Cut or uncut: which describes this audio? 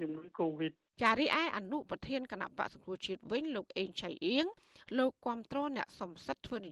cut